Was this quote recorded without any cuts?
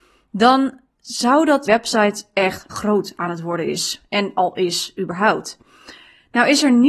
no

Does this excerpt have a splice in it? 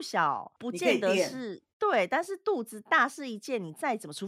yes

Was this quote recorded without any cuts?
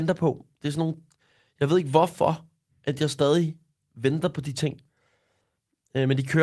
yes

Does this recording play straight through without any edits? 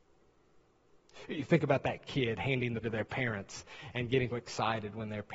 no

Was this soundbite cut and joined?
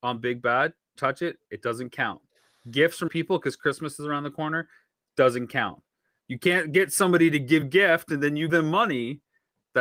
yes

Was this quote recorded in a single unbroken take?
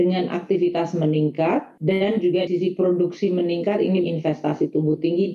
no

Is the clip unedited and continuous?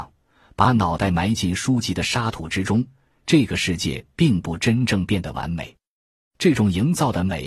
yes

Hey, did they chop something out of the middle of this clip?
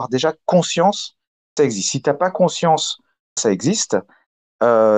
yes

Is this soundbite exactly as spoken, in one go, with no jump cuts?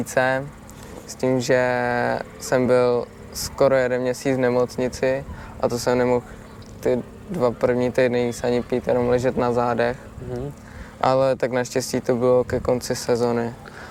yes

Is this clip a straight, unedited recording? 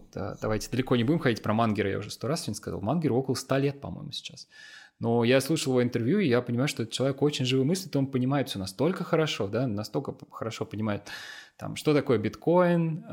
yes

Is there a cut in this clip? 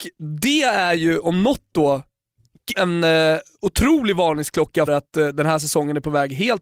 yes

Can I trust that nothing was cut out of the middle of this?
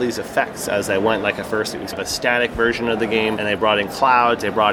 no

